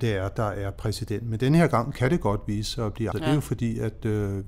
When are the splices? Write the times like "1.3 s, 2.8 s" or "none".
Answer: 3.1 s